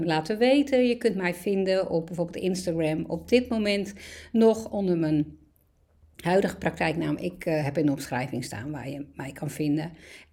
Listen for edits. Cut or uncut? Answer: uncut